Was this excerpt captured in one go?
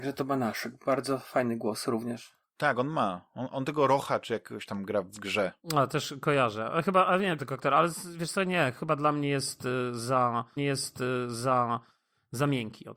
no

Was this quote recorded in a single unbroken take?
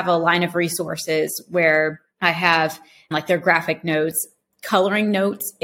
yes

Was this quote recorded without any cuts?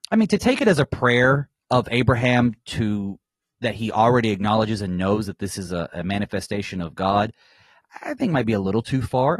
yes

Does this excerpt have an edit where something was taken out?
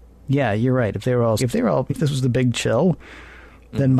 yes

